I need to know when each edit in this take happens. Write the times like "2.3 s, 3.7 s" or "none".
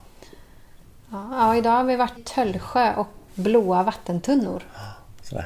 2.2 s, 3.3 s